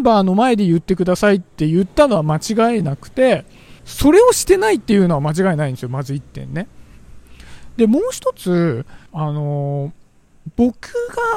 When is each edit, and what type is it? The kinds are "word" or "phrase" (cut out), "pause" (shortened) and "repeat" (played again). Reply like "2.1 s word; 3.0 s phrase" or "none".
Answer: 3.8 s pause; 9.1 s pause